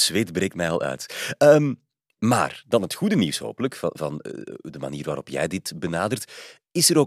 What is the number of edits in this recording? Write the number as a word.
zero